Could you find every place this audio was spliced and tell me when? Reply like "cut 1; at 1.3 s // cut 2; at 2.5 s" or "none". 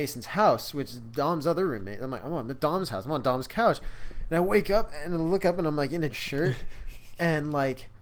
cut 1; at 6.1 s